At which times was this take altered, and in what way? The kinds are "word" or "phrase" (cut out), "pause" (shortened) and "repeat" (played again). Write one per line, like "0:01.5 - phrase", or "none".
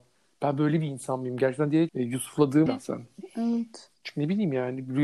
0:01.9 - word
0:02.7 - word